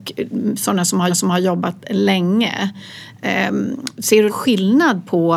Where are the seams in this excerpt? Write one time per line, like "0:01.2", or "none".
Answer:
0:01.1
0:04.3